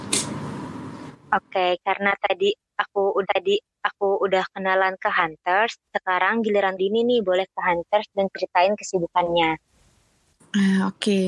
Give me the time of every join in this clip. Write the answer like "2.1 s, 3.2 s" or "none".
3.2 s, 5.9 s, 6.8 s, 7.5 s